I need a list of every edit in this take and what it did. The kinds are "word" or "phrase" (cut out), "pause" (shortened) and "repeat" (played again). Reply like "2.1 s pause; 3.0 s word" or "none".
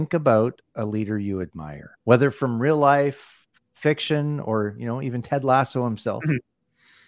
2.0 s pause